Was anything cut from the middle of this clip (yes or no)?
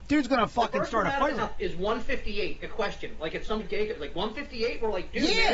yes